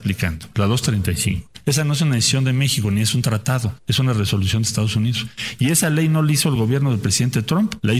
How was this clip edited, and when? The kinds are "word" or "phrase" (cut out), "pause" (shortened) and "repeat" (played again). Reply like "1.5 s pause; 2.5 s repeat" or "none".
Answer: none

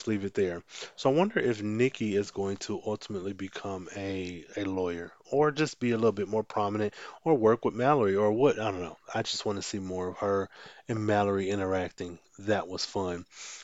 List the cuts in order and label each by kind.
none

